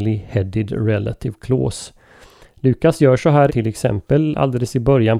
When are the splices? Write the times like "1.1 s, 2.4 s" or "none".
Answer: 3.5 s